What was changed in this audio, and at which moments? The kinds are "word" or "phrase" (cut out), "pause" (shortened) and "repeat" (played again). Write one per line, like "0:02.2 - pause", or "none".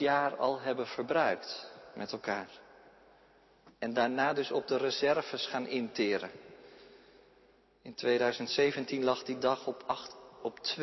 none